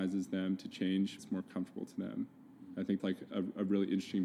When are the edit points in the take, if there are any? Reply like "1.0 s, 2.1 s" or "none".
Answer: 1.2 s, 3.0 s